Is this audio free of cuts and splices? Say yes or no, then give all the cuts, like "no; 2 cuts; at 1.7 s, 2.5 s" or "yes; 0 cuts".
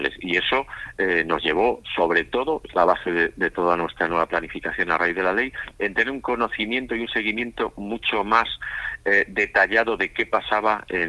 yes; 0 cuts